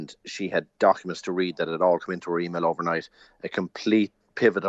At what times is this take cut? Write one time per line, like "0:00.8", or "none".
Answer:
none

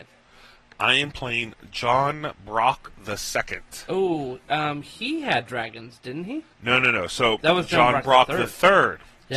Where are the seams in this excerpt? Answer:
0:06.5

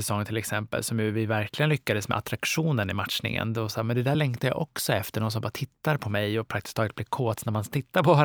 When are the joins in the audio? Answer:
none

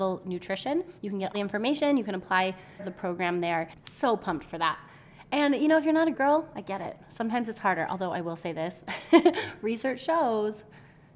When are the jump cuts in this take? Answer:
0:01.0
0:01.3
0:02.8
0:06.1

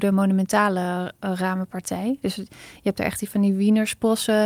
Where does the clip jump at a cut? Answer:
none

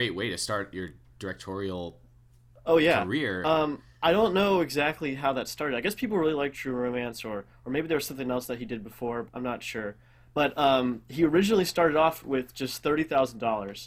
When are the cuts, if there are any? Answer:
0:09.3

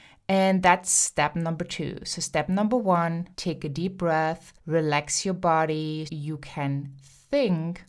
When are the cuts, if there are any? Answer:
0:03.3
0:04.6
0:06.1

